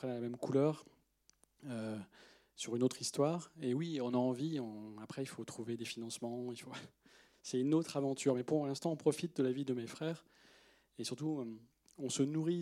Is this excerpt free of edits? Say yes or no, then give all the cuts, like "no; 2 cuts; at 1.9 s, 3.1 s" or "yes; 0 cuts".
yes; 0 cuts